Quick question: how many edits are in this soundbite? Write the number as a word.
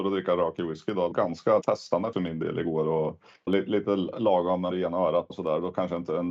six